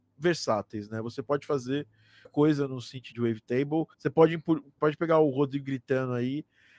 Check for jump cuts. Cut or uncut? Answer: cut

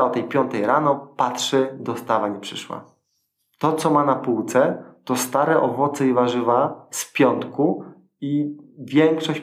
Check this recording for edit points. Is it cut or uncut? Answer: uncut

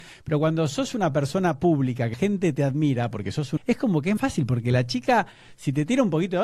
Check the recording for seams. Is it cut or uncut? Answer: cut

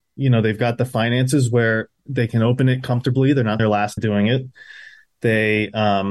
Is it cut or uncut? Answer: cut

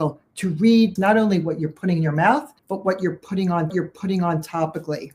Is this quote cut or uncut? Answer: cut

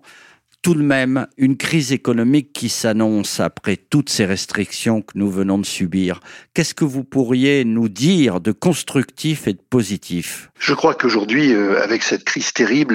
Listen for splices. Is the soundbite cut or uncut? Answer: cut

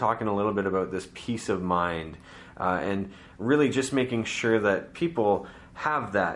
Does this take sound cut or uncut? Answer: uncut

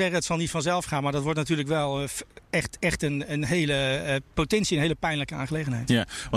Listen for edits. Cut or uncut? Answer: cut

